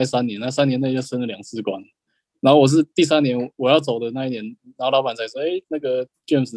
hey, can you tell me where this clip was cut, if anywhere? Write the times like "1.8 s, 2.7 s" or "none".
none